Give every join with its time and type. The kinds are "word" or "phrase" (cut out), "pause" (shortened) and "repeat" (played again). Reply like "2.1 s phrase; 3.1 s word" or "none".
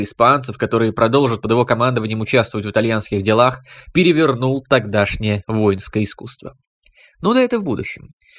none

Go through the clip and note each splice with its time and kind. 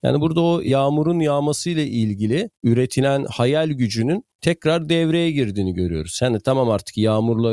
2.5 s pause; 4.3 s pause

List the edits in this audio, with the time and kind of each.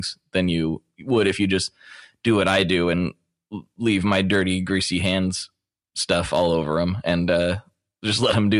none

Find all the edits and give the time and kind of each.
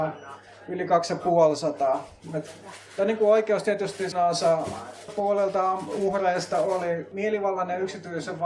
4.1 s word; 5.1 s word; 7.1 s word

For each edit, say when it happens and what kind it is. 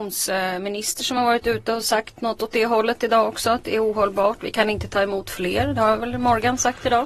none

